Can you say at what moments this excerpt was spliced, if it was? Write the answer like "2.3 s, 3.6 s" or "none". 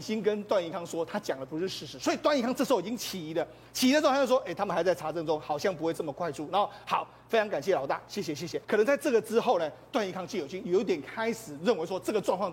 8.6 s